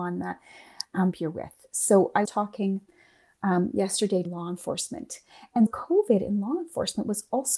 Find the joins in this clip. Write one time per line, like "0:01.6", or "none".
0:01.1
0:02.2
0:04.2
0:05.7

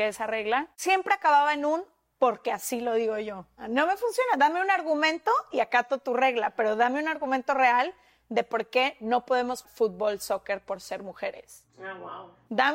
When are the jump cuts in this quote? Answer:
0:09.6
0:11.7

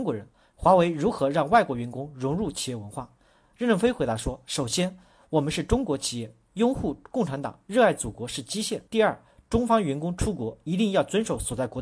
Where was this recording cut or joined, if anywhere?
0:08.9

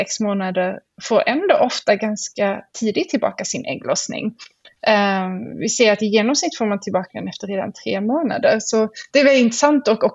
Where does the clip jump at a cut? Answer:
0:09.1

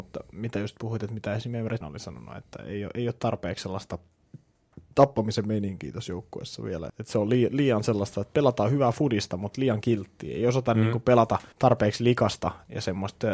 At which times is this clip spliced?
0:01.8
0:04.9
0:06.9
0:11.5

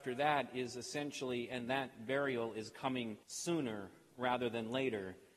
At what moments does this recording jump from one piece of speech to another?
0:03.2

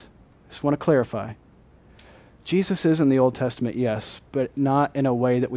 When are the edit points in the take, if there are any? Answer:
none

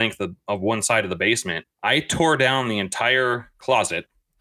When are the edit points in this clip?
0:01.7

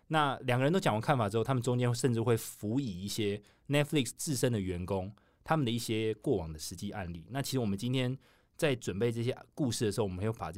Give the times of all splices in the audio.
none

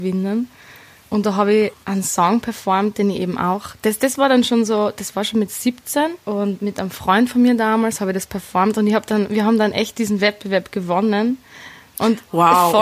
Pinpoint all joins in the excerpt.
0:06.2

